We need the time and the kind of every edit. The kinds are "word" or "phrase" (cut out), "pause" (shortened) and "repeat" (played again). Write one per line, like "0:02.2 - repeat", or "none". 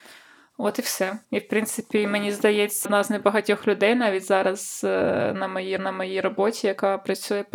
0:01.2 - pause
0:02.8 - word
0:05.8 - repeat